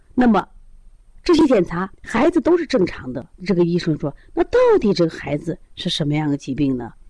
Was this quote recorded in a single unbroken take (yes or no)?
no